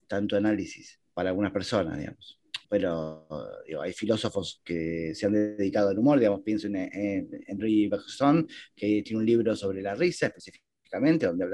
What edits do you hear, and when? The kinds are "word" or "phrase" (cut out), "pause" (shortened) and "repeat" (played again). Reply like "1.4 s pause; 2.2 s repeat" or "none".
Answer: 1.1 s pause; 2.6 s pause